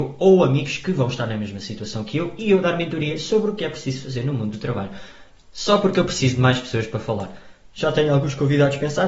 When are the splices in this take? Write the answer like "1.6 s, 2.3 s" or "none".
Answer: none